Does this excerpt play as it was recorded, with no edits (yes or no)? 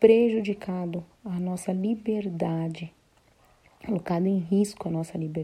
no